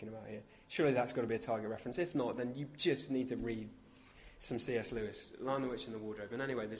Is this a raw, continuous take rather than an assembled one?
yes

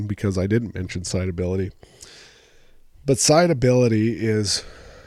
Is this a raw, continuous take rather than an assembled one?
yes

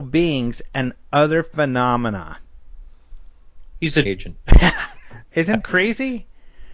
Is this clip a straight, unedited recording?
no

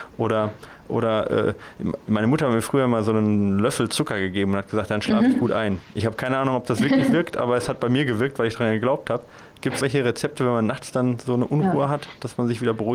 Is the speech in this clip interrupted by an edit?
yes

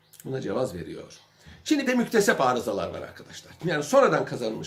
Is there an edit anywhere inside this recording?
yes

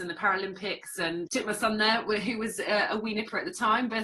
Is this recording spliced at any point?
yes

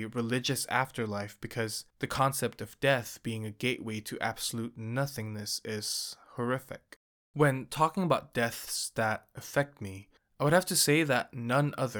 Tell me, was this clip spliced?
yes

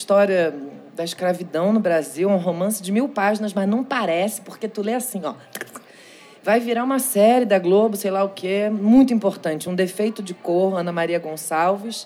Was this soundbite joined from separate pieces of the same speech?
no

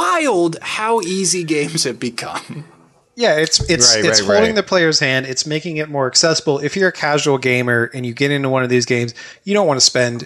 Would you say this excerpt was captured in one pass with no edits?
yes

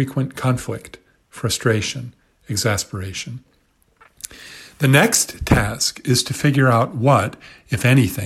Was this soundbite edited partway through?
no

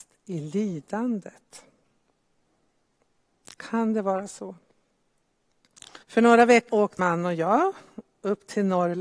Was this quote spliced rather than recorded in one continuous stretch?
yes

